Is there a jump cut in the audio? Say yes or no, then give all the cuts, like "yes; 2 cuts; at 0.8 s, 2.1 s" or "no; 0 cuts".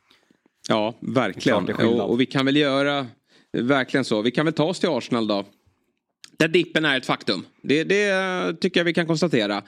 no; 0 cuts